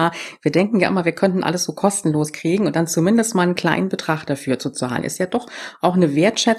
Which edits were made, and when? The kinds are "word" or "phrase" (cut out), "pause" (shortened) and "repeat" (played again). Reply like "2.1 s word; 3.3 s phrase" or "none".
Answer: none